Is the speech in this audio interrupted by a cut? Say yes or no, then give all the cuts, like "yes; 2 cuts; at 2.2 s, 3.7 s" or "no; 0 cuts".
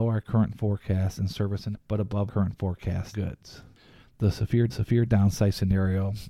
yes; 4 cuts; at 1.7 s, 2.3 s, 3.1 s, 4.7 s